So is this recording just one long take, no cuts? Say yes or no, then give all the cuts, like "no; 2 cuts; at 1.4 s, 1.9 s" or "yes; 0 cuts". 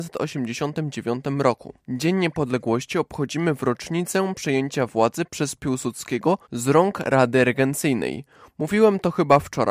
no; 2 cuts; at 1.8 s, 6.4 s